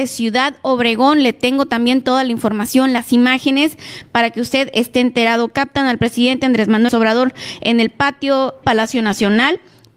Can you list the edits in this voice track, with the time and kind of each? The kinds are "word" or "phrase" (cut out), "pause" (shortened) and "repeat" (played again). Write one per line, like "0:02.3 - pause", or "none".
0:06.9 - word
0:08.6 - word